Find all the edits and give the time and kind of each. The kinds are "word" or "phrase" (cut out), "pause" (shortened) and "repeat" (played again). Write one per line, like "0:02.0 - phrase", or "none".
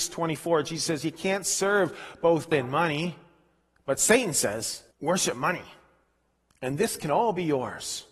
0:02.5 - word
0:04.9 - pause